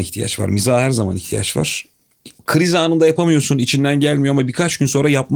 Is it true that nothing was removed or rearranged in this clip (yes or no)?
no